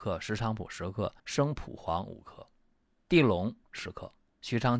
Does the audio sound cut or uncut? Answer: cut